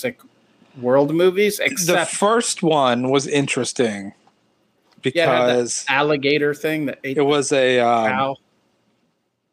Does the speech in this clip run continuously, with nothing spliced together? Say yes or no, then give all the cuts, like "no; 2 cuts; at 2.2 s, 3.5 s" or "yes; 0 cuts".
yes; 0 cuts